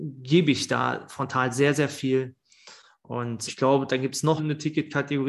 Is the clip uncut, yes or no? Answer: no